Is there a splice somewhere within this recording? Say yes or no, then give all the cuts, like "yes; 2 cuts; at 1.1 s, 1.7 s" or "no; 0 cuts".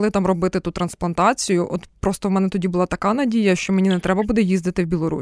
no; 0 cuts